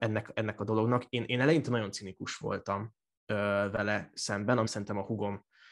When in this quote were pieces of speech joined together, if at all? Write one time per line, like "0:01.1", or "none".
0:04.7